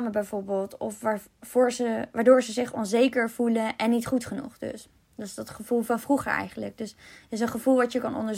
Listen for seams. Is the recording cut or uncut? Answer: uncut